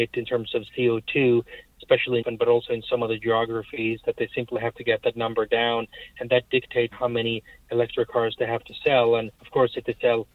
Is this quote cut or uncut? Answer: cut